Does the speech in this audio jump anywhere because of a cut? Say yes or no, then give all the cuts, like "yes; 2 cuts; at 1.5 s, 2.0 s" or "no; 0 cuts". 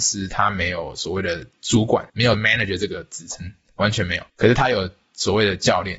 yes; 2 cuts; at 2.1 s, 4.3 s